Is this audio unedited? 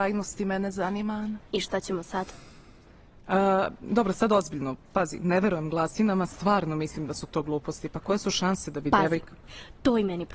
yes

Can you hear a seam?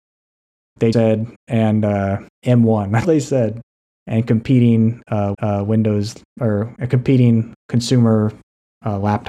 yes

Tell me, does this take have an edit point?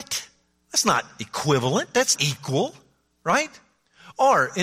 yes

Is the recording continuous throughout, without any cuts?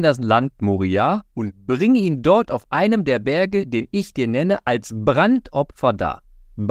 no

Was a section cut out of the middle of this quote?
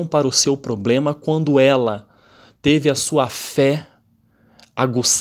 no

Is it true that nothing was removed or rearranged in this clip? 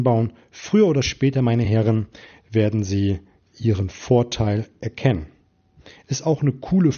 yes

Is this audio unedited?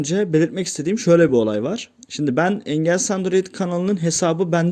yes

